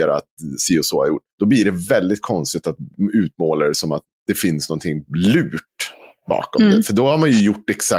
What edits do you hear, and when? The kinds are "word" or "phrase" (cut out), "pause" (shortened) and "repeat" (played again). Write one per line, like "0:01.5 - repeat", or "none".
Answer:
0:01.3 - pause
0:05.1 - pause